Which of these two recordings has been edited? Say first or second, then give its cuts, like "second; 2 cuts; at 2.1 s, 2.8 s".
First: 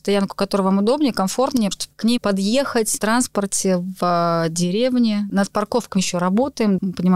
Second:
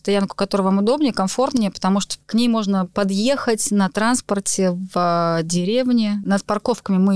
first; 4 cuts; at 1.7 s, 2.2 s, 3.0 s, 6.0 s